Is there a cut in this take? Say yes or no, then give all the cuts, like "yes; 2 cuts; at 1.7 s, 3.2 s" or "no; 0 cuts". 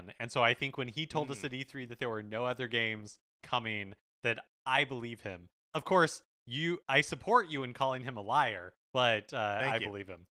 yes; 3 cuts; at 3.4 s, 6.8 s, 8.8 s